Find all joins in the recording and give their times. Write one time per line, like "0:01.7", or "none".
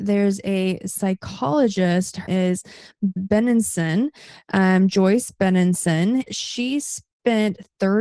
0:02.3
0:03.2
0:06.3